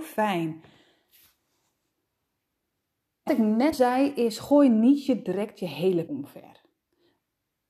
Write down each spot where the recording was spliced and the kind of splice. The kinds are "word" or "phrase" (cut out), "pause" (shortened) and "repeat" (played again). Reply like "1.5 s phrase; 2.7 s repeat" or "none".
3.3 s word; 3.7 s word; 6.1 s word